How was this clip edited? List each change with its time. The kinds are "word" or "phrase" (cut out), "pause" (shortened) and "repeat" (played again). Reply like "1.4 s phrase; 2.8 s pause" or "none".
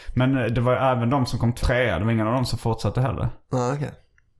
1.6 s word